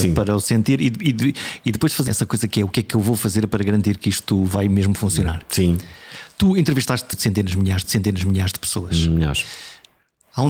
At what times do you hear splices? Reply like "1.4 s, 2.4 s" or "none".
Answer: 2.1 s, 7.1 s, 7.8 s